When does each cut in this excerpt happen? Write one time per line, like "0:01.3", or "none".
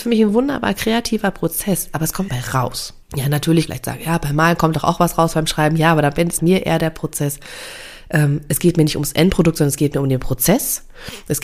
0:02.3
0:03.0
0:03.7
0:06.4